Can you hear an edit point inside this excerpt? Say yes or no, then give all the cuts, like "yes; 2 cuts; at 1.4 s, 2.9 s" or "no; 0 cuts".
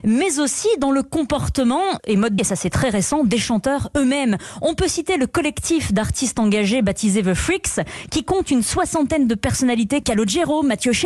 yes; 3 cuts; at 2.0 s, 2.4 s, 10.0 s